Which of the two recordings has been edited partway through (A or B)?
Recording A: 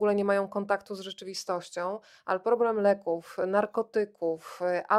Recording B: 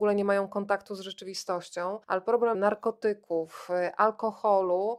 B